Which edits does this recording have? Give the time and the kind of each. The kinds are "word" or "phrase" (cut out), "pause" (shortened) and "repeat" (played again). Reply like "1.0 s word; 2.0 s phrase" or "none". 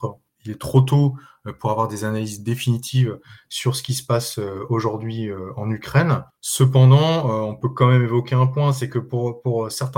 none